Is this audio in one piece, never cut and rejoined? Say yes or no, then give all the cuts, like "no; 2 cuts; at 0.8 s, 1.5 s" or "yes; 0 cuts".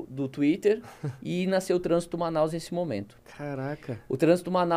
no; 1 cut; at 3.2 s